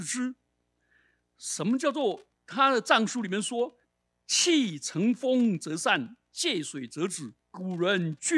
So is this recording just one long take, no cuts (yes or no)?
no